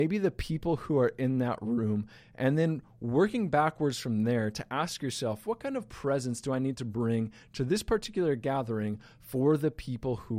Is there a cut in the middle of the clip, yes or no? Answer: no